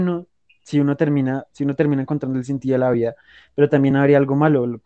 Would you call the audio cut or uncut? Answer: uncut